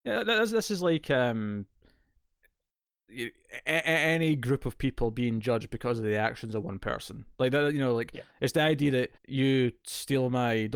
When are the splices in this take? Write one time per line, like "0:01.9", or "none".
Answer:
0:09.2